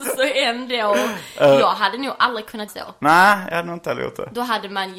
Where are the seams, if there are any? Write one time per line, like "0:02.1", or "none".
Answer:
0:02.7